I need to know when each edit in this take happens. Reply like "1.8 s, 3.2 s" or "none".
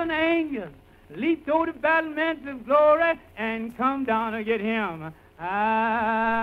none